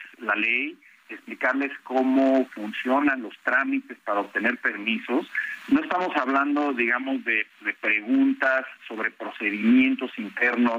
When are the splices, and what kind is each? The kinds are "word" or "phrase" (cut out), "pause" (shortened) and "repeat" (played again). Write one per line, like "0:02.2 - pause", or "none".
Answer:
none